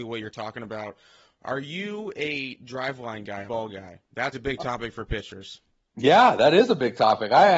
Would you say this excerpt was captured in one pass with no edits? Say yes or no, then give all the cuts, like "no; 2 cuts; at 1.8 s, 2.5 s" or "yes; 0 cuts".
no; 2 cuts; at 3.5 s, 4.3 s